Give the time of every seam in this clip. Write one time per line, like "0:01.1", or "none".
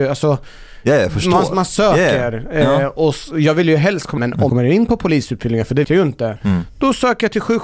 0:04.2
0:04.5
0:05.8

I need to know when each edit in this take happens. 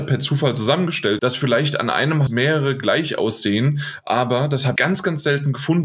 0:01.2
0:02.3
0:04.8

